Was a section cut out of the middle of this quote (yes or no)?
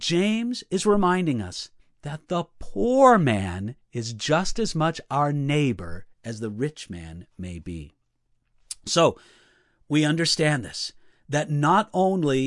yes